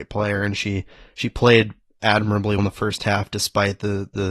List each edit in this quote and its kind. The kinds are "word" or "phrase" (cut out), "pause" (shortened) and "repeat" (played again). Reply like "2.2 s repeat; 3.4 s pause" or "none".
2.6 s word